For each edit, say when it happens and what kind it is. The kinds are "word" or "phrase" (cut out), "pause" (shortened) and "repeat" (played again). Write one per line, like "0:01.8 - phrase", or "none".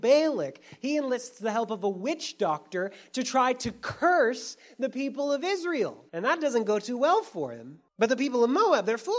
0:06.1 - pause
0:07.9 - pause